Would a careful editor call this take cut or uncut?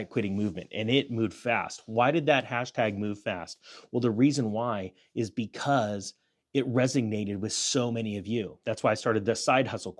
uncut